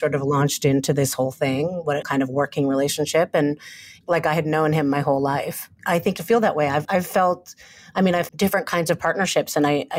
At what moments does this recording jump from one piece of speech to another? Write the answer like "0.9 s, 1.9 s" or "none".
2.0 s, 4.0 s, 6.2 s, 6.8 s, 8.3 s